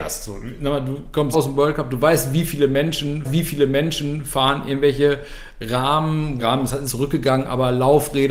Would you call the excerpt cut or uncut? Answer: cut